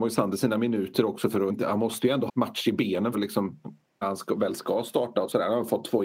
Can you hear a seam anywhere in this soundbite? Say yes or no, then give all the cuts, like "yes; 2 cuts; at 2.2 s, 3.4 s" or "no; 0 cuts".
yes; 4 cuts; at 1.5 s, 2.3 s, 3.1 s, 4.0 s